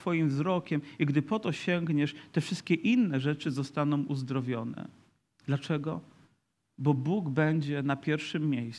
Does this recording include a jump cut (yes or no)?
no